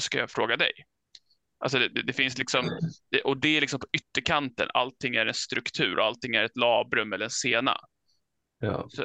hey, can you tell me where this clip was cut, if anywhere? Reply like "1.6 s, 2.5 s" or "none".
none

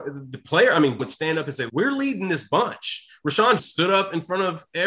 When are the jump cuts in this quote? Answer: 1.0 s, 1.7 s, 3.6 s

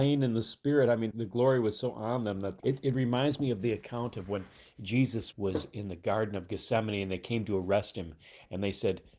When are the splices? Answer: 1.1 s, 2.6 s, 5.3 s

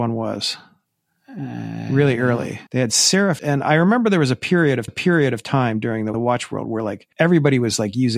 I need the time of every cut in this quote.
2.7 s, 3.4 s, 4.9 s, 6.1 s, 7.1 s

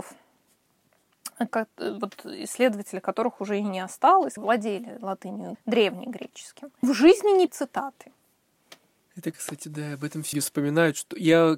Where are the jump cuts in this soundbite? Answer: 1.5 s, 4.4 s, 5.5 s, 6.8 s, 7.5 s, 9.3 s, 10.3 s

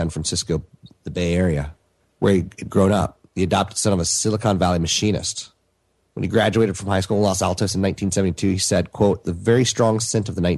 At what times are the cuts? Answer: 2.0 s, 3.3 s, 5.8 s

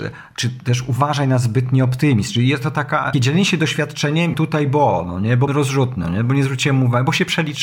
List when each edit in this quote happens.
3.1 s, 4.3 s, 5.5 s

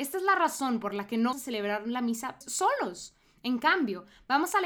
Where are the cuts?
1.3 s, 2.4 s

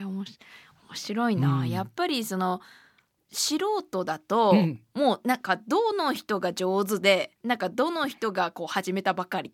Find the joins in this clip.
7.4 s

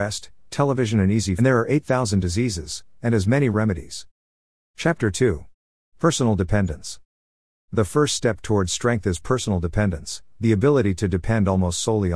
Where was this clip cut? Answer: 1.4 s

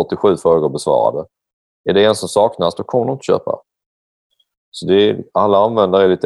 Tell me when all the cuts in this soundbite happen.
none

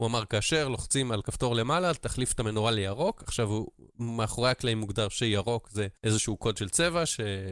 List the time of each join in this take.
6.0 s

